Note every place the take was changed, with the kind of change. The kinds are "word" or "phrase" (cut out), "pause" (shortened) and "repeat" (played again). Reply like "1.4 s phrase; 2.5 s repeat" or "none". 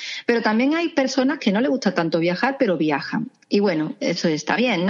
none